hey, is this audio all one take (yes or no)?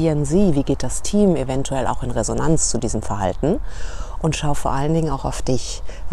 yes